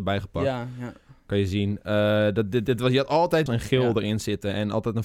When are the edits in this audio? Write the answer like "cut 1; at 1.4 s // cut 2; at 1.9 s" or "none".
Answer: cut 1; at 3.5 s